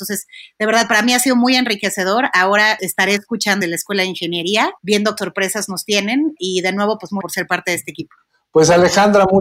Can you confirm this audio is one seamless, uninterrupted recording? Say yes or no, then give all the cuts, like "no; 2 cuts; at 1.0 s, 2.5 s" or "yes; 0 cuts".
no; 6 cuts; at 2.8 s, 3.6 s, 4.8 s, 5.2 s, 6.4 s, 7.2 s